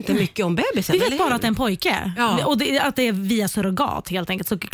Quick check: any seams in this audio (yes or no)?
no